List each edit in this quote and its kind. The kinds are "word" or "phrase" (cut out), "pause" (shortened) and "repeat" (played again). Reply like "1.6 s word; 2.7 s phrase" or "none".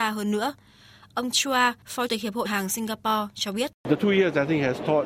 1.3 s word; 2.1 s word; 2.4 s word